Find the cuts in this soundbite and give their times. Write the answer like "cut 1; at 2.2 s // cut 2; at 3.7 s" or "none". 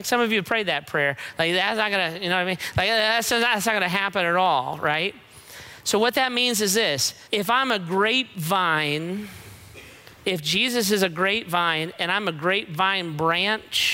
cut 1; at 7.3 s